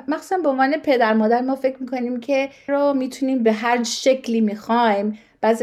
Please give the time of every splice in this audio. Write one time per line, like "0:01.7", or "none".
0:02.7